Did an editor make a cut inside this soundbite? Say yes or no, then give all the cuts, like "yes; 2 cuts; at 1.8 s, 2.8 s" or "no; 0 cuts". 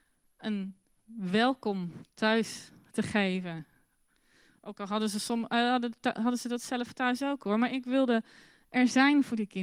no; 0 cuts